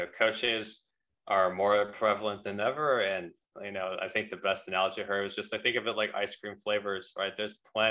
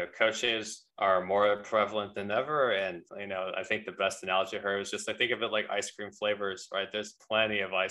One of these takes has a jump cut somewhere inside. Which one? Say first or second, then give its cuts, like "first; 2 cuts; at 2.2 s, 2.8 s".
second; 2 cuts; at 0.9 s, 3.1 s